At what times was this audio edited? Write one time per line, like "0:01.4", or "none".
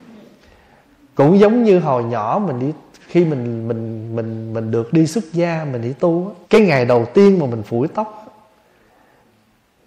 0:06.4